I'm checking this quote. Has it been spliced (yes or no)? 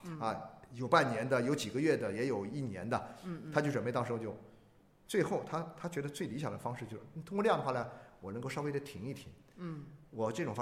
no